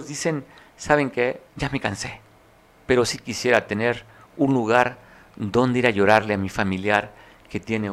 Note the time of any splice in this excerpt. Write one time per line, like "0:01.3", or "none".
0:01.5